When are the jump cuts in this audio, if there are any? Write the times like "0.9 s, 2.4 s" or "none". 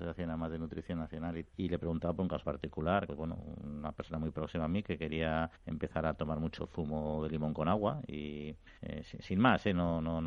1.4 s, 2.4 s, 3.1 s, 5.6 s, 8.8 s